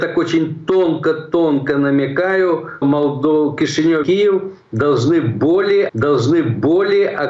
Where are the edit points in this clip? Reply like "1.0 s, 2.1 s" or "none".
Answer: 2.8 s, 4.0 s, 5.9 s